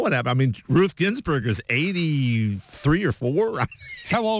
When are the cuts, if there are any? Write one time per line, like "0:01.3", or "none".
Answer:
none